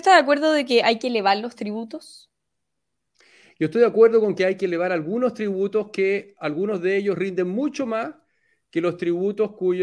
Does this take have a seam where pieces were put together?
no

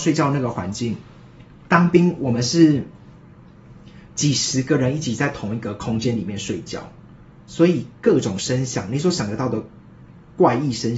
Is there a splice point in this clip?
no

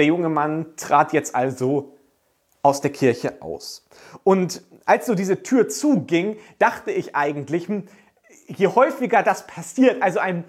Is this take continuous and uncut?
yes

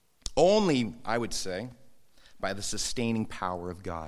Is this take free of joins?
yes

